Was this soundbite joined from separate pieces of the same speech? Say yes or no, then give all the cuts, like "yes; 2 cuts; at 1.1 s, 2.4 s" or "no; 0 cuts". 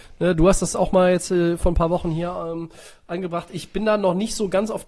no; 0 cuts